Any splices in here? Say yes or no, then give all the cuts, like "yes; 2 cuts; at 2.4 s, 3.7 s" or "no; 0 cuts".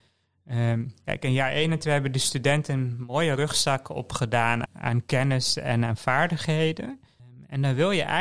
yes; 2 cuts; at 4.7 s, 5.9 s